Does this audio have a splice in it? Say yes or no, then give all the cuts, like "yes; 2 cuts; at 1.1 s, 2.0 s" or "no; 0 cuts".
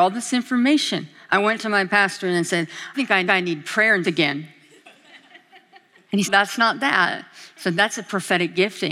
yes; 4 cuts; at 2.9 s, 3.3 s, 4.0 s, 6.2 s